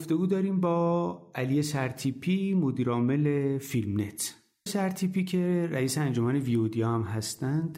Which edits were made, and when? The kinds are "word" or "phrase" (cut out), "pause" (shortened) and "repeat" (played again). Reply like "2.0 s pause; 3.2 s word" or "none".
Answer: 4.7 s word